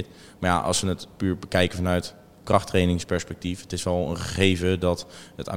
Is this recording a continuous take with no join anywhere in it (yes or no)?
yes